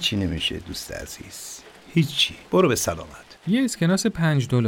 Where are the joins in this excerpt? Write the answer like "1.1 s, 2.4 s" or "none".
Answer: 2.4 s, 3.4 s